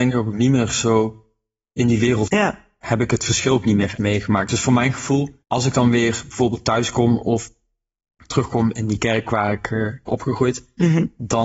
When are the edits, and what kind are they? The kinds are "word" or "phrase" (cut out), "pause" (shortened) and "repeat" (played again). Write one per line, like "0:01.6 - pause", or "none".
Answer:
0:02.3 - word
0:04.0 - word
0:05.4 - pause
0:10.1 - word